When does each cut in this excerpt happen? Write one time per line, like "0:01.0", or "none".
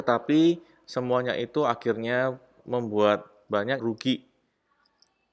0:02.6
0:03.8